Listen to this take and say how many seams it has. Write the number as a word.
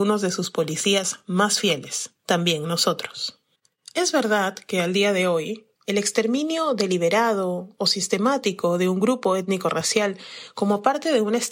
two